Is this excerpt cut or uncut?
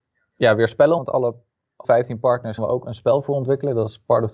cut